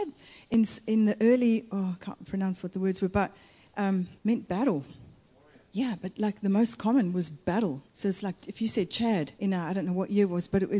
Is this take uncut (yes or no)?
no